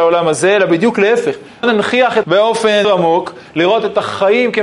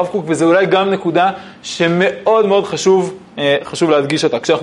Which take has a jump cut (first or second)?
first